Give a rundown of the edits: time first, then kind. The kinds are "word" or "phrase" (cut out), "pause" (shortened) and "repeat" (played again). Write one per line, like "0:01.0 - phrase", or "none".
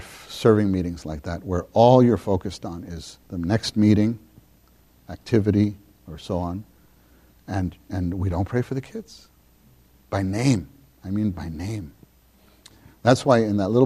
0:03.2 - pause